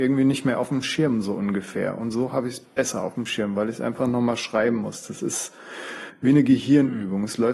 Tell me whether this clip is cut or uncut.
uncut